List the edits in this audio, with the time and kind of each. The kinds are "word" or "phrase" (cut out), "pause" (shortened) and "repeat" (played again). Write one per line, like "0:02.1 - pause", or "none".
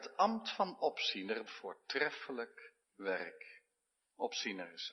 0:01.5 - phrase
0:02.8 - pause